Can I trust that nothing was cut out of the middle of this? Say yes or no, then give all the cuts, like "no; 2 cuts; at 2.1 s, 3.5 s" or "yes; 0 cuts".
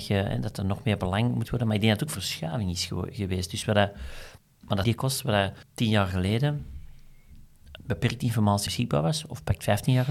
no; 7 cuts; at 1.4 s, 2.1 s, 4.4 s, 4.8 s, 5.6 s, 7.8 s, 8.7 s